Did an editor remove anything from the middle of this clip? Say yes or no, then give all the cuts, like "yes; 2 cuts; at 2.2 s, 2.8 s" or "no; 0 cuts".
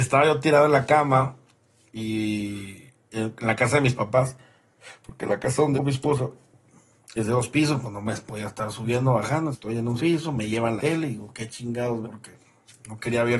yes; 5 cuts; at 5.7 s, 9.5 s, 10.0 s, 10.8 s, 12.0 s